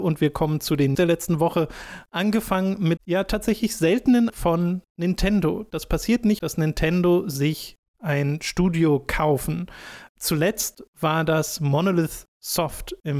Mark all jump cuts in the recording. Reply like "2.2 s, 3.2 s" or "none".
0.9 s, 3.0 s, 4.3 s, 6.4 s